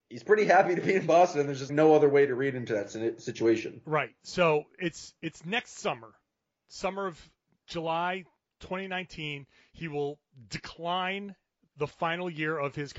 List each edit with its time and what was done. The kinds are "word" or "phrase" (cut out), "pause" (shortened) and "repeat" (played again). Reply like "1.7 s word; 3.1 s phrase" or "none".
1.7 s word